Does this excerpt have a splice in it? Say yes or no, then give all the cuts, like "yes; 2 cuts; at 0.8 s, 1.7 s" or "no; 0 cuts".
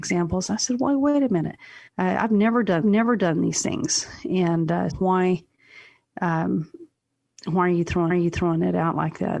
yes; 4 cuts; at 1.9 s, 2.8 s, 4.9 s, 8.1 s